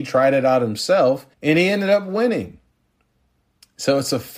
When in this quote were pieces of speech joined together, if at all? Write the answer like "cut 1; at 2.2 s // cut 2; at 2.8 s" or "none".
cut 1; at 1.3 s